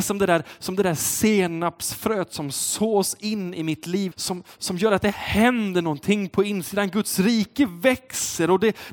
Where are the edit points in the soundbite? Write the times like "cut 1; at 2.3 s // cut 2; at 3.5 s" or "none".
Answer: cut 1; at 4.1 s